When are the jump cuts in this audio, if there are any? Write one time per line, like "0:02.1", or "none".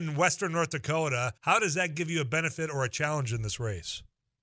0:01.4